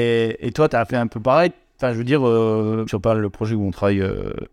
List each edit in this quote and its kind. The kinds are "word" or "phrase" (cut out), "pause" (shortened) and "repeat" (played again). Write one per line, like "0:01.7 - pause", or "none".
0:02.9 - word